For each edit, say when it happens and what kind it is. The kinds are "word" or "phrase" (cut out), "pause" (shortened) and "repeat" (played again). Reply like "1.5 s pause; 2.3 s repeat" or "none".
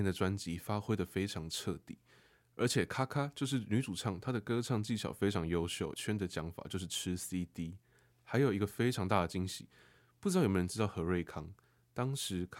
5.9 s phrase